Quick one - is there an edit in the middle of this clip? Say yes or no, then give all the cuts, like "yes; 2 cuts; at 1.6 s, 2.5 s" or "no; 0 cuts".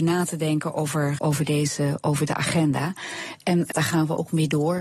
yes; 3 cuts; at 1.2 s, 2.3 s, 3.7 s